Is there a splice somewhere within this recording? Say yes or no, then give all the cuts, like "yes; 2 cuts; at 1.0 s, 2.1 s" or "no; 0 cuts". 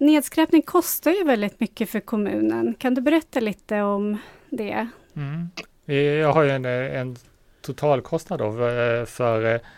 no; 0 cuts